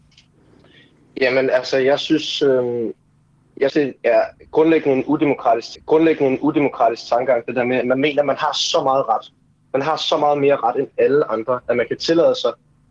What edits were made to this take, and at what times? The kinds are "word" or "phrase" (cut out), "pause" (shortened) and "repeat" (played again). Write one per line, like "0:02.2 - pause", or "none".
0:03.7 - word
0:05.7 - repeat